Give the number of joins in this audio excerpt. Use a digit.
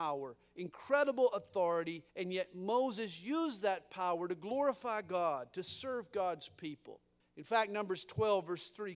2